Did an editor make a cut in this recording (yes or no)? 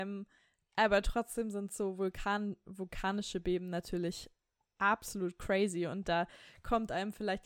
no